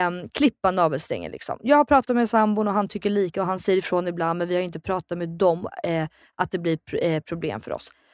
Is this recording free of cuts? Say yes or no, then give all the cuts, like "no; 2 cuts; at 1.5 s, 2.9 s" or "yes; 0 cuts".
yes; 0 cuts